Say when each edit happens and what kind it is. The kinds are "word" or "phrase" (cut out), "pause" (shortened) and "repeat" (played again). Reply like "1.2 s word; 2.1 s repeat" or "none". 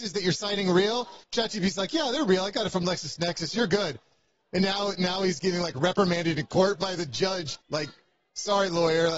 1.2 s pause; 7.6 s pause